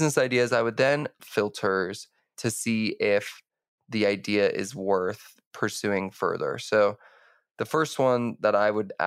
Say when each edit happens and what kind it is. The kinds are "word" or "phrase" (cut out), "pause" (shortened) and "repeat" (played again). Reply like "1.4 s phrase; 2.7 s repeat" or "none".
1.2 s phrase